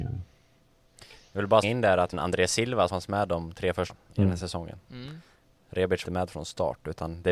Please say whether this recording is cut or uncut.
cut